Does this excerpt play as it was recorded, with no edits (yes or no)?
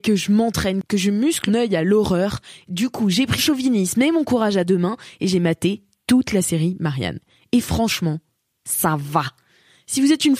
no